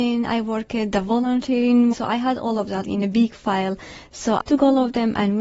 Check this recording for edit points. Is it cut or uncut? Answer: cut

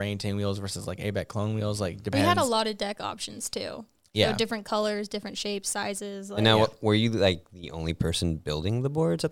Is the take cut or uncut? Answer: uncut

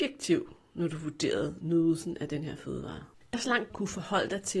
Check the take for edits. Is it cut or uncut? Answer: cut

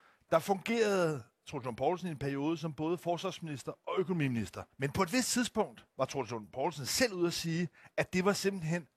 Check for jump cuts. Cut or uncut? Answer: cut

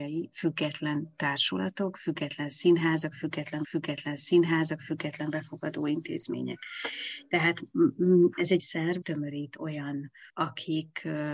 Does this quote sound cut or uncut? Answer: cut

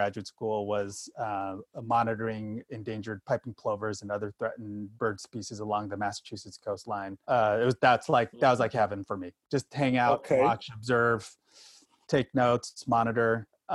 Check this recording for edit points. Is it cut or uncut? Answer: cut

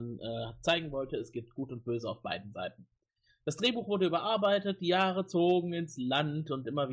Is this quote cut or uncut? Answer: uncut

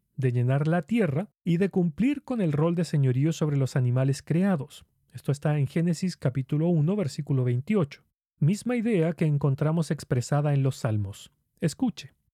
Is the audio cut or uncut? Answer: uncut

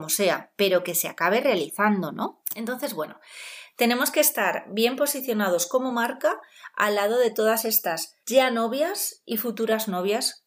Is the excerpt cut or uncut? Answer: uncut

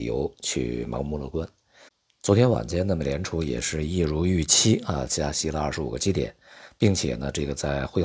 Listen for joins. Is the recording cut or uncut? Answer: uncut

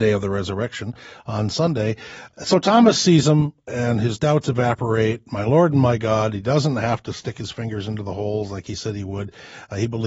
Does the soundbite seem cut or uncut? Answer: uncut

